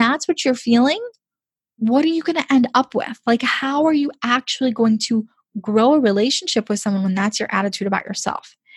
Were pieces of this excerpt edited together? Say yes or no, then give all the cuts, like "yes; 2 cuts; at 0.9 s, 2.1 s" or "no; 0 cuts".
no; 0 cuts